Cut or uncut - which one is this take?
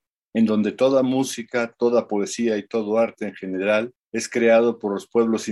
cut